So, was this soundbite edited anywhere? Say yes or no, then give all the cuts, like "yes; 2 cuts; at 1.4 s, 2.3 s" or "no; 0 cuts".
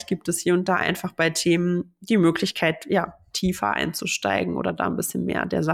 yes; 1 cut; at 3.3 s